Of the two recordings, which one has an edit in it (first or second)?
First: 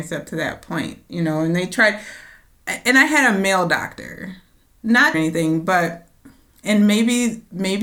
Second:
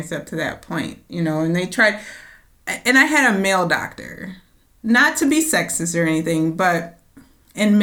first